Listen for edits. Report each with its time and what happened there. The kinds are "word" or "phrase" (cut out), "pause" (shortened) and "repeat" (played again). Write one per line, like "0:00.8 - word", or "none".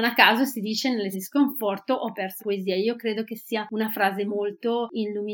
0:01.1 - word
0:02.4 - word
0:04.3 - word